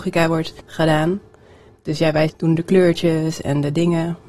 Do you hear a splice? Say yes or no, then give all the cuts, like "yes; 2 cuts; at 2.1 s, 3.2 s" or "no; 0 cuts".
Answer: no; 0 cuts